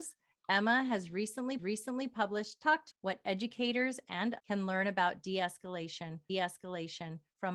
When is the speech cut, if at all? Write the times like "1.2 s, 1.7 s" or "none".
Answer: 1.6 s, 2.9 s, 4.4 s, 6.3 s